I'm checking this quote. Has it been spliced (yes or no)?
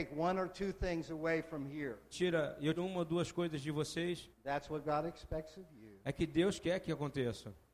yes